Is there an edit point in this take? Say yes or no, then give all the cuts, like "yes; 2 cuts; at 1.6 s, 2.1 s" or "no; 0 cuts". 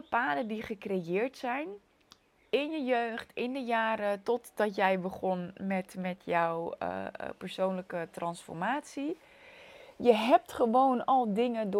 no; 0 cuts